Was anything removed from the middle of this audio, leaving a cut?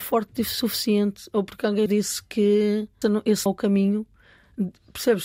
yes; 3 cuts; at 1.9 s, 3.0 s, 3.5 s

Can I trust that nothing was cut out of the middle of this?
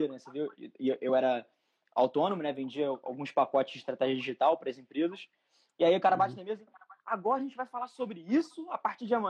yes; 0 cuts

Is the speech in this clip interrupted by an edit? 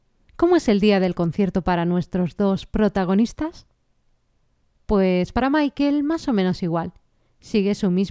no; 0 cuts

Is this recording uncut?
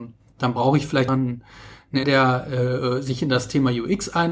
no; 2 cuts; at 1.1 s, 2.0 s

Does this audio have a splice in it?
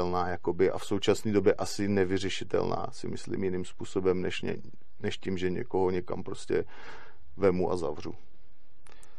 no; 0 cuts

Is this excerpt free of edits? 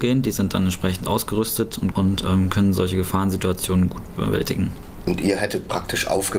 no; 1 cut; at 1.9 s

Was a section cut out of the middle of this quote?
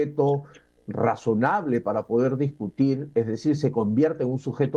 no; 0 cuts

